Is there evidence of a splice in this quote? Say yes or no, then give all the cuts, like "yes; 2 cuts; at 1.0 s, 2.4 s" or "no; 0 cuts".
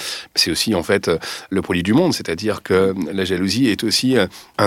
no; 0 cuts